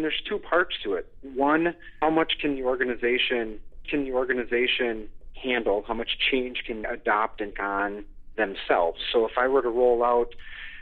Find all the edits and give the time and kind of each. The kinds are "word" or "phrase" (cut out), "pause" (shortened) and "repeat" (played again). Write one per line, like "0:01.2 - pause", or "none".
0:02.0 - word
0:03.8 - repeat
0:06.8 - word
0:07.5 - word